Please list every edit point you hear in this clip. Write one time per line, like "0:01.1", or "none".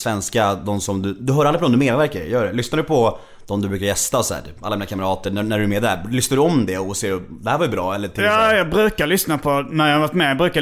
none